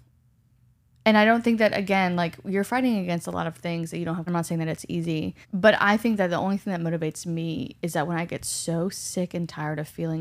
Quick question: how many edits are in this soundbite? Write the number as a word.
two